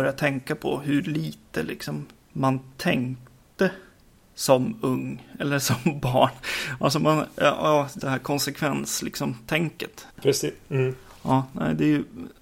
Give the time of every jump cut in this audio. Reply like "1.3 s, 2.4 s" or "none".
8.0 s, 10.1 s